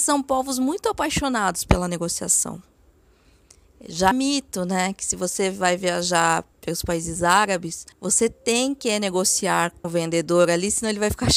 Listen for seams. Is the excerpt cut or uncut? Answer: cut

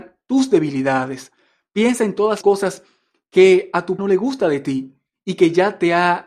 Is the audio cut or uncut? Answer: cut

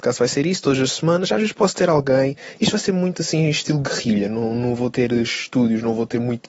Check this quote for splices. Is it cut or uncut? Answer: uncut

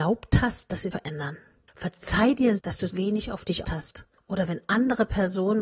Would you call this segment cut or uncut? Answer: cut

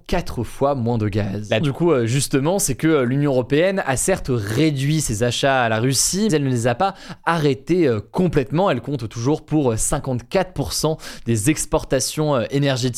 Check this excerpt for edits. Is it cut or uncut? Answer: cut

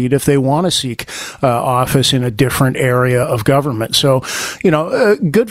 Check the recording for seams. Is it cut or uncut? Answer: uncut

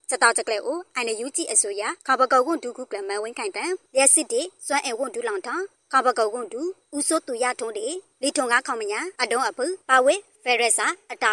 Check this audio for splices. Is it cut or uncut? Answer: cut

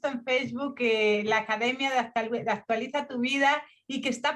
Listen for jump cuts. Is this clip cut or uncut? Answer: uncut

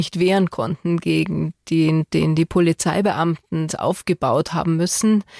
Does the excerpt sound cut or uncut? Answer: cut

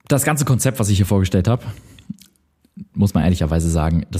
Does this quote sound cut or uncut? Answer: uncut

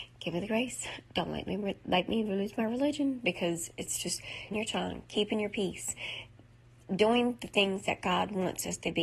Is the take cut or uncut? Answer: cut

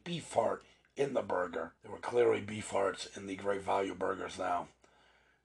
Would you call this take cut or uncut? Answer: cut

